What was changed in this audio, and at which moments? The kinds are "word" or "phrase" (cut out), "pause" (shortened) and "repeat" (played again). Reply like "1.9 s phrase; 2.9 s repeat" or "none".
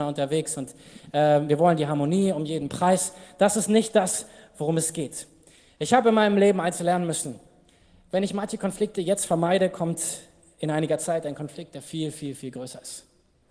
none